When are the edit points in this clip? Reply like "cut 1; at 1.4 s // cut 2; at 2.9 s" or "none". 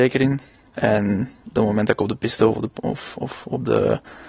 none